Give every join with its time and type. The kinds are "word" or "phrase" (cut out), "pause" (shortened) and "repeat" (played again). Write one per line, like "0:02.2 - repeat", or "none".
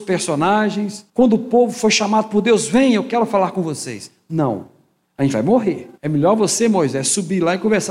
0:01.1 - pause
0:06.0 - pause